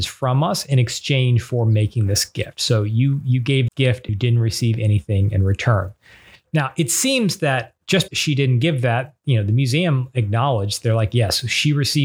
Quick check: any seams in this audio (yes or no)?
yes